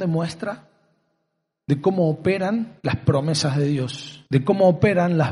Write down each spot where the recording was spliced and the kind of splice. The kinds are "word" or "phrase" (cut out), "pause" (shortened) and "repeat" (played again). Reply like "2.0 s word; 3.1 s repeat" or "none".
2.8 s pause; 4.3 s pause

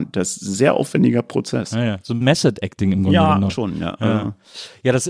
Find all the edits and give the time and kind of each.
2.2 s word; 3.5 s phrase

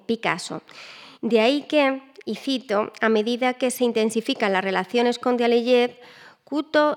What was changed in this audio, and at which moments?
1.1 s pause

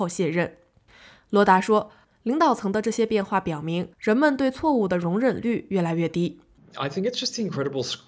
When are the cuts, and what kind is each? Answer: 3.9 s pause

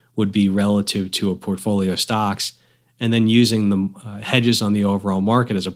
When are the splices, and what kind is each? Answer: none

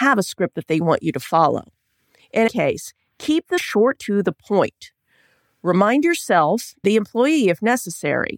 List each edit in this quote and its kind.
2.5 s word; 3.6 s word; 4.0 s word; 6.8 s word

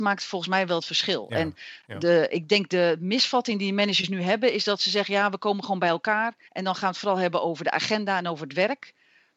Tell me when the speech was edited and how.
6.5 s pause

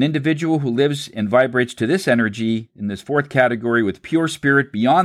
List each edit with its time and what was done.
none

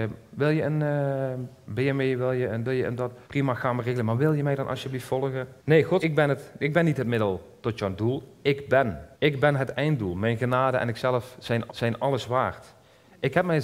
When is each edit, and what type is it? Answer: 2.6 s word; 3.2 s pause; 5.6 s pause; 6.0 s word; 9.1 s pause; 11.7 s repeat

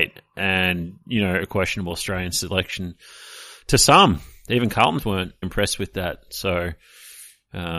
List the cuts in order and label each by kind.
1.9 s word; 5.0 s word; 5.4 s word

